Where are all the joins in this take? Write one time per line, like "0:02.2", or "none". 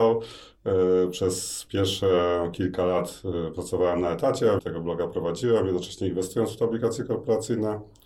0:04.6

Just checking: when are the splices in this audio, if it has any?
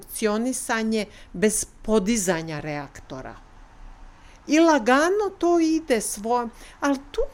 none

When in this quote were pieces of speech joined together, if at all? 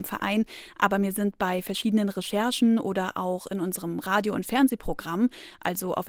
none

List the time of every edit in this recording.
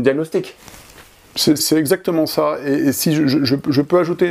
0:01.6

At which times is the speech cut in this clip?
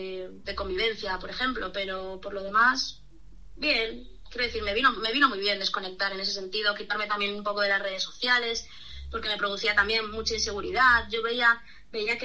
none

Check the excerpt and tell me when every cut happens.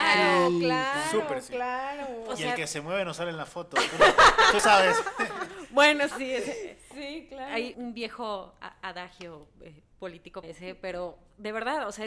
0:04.6
0:06.1
0:07.7
0:10.4

